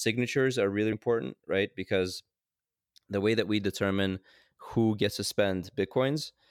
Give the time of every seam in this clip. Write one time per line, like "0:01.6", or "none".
0:00.9